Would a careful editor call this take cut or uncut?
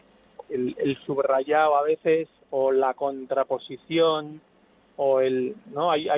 uncut